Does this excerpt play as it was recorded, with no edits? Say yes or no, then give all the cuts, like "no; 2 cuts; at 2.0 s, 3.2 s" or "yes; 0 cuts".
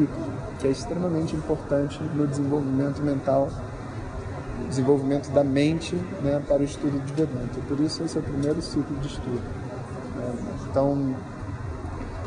yes; 0 cuts